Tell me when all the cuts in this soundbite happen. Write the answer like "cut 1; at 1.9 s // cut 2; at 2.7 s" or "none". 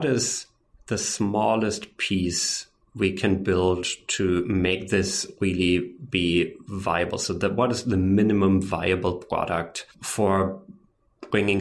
cut 1; at 9.9 s